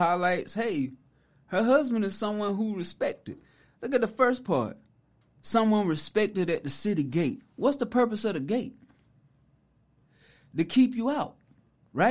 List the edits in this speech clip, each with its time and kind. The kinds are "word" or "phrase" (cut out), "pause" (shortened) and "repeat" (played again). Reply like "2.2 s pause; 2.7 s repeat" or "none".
none